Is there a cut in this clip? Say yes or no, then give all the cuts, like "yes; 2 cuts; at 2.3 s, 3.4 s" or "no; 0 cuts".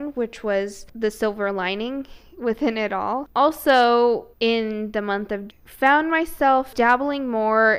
yes; 2 cuts; at 4.3 s, 5.5 s